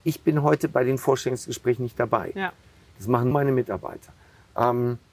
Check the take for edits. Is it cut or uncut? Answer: cut